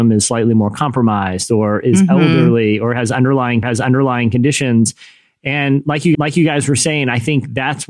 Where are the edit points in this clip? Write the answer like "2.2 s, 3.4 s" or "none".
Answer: 3.6 s, 6.1 s

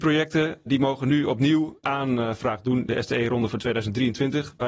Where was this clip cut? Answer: 1.8 s, 2.9 s

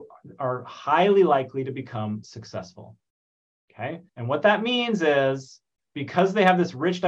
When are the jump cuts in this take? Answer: 2.2 s, 4.1 s

